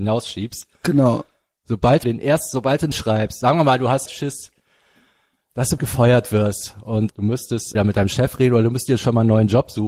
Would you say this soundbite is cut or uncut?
cut